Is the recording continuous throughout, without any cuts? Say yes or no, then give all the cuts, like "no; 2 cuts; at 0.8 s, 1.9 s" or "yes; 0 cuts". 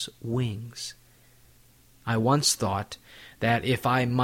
yes; 0 cuts